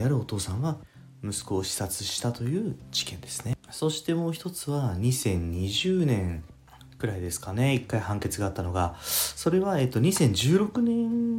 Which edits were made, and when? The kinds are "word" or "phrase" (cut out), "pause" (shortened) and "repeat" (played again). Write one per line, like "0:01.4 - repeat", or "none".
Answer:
0:03.6 - pause